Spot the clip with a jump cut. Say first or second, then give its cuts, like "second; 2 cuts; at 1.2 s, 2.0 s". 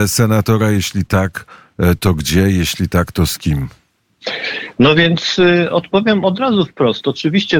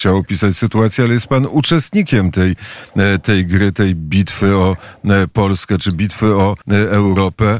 second; 1 cut; at 6.6 s